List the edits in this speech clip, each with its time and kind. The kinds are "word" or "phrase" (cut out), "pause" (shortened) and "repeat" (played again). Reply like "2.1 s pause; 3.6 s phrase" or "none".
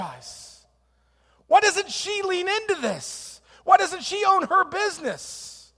none

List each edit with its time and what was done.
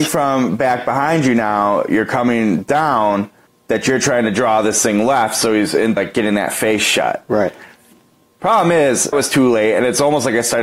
3.5 s pause; 6.0 s word; 9.1 s word

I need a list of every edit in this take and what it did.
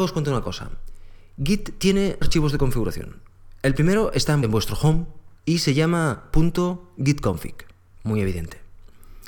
2.2 s word; 4.4 s phrase; 5.4 s pause; 7.9 s pause

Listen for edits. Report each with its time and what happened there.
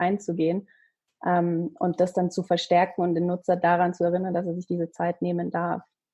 none

